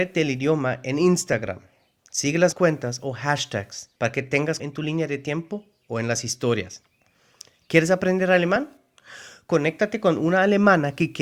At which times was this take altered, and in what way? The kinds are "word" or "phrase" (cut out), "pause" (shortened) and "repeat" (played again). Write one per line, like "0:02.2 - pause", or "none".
0:02.5 - word
0:04.0 - pause
0:04.6 - word